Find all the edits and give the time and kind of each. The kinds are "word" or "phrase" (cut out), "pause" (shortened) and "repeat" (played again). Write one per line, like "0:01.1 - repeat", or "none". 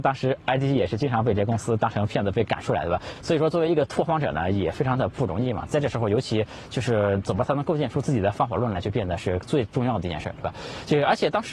none